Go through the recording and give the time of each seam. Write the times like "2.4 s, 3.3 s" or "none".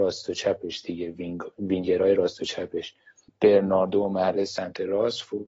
none